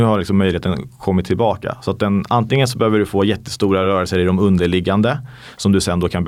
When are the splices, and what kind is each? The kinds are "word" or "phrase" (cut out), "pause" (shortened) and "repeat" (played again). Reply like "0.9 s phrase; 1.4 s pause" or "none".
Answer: none